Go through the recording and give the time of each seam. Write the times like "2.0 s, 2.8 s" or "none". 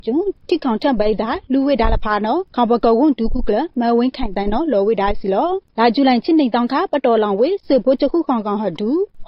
2.5 s